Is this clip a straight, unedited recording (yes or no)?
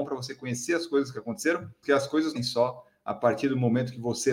no